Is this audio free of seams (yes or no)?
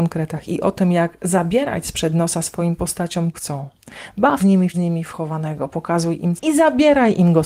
no